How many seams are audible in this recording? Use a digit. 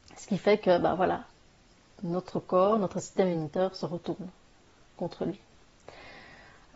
0